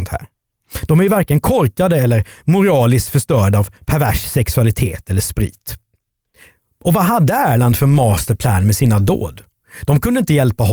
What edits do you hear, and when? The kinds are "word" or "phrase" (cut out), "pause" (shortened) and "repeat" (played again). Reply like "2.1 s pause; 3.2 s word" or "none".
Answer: none